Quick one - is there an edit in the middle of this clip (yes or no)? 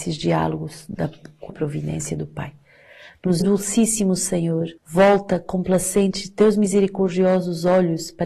yes